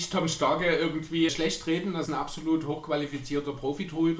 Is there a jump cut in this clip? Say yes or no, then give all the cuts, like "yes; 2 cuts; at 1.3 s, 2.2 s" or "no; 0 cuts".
yes; 2 cuts; at 1.3 s, 2.1 s